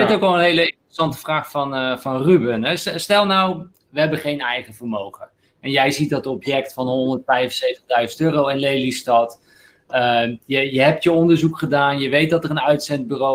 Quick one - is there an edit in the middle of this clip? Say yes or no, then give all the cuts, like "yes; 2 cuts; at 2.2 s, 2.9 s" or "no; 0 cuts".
no; 0 cuts